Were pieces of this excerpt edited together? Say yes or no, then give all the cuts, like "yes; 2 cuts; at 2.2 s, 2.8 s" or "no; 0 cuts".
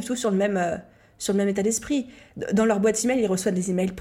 no; 0 cuts